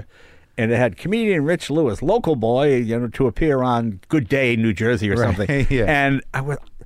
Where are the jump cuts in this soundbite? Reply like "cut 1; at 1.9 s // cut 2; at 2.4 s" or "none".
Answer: cut 1; at 4.0 s